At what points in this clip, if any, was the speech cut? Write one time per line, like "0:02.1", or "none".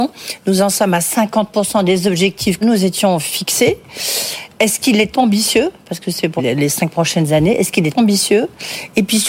0:02.6
0:05.1
0:06.4
0:07.9